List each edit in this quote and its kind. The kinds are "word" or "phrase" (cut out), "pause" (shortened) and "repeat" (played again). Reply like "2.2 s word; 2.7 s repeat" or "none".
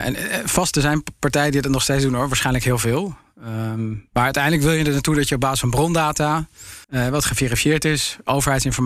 6.8 s pause